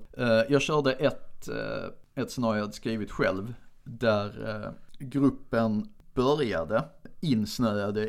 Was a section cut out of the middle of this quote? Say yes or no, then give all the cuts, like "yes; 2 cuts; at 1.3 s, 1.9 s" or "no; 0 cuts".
no; 0 cuts